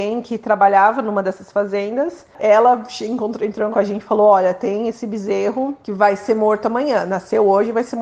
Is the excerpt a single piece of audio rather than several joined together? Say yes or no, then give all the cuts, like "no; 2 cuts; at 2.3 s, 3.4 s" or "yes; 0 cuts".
no; 2 cuts; at 3.7 s, 5.8 s